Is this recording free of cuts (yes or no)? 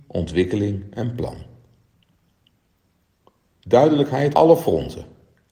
no